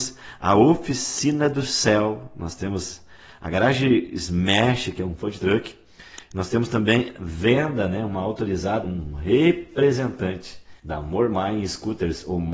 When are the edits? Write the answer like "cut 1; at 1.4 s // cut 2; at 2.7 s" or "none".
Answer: cut 1; at 10.8 s